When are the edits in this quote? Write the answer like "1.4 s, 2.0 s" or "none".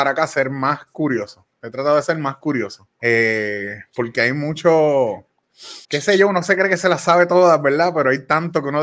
2.9 s, 5.8 s